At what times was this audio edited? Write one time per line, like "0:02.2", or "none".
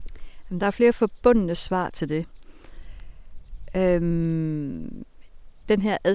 none